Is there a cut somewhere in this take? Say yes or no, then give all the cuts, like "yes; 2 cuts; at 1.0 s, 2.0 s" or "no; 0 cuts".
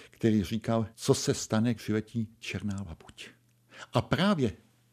yes; 2 cuts; at 0.9 s, 1.7 s